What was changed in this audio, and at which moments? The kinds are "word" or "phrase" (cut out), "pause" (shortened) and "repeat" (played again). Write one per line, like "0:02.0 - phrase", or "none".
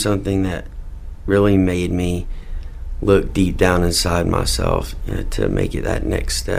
none

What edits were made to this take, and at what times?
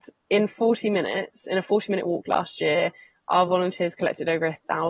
none

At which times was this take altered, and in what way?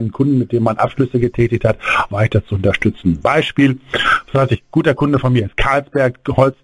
0:02.1 - word

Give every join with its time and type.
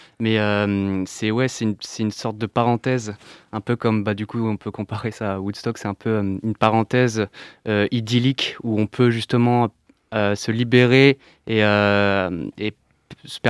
none

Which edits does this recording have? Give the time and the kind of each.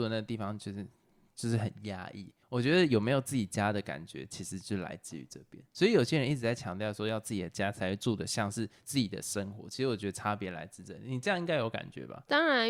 0:02.4 - pause

